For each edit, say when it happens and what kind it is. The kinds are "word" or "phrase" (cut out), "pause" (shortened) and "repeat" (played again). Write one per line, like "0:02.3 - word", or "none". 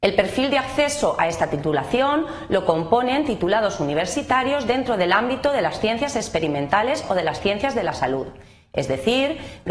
none